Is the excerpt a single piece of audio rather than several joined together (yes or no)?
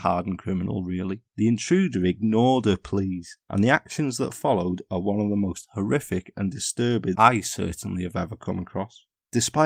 no